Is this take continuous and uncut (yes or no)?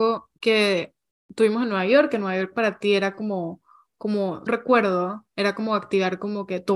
no